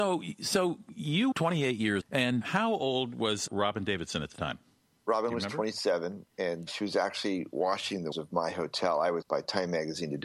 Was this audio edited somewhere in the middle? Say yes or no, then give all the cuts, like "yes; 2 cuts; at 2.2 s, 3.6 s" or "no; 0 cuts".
yes; 7 cuts; at 1.3 s, 2.0 s, 2.4 s, 3.5 s, 6.7 s, 8.1 s, 9.2 s